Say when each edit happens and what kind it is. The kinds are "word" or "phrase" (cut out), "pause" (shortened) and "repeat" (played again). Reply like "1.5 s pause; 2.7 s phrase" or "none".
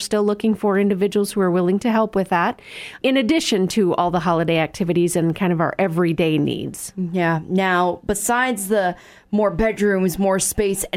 3.0 s word